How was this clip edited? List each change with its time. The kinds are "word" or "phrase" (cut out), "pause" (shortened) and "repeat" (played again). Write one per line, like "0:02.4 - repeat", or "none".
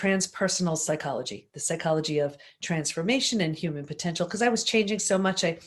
none